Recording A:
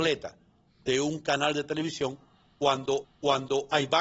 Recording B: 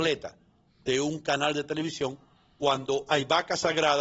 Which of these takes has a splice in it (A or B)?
A